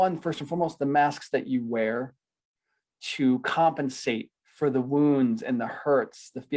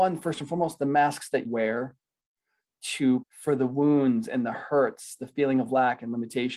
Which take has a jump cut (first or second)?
second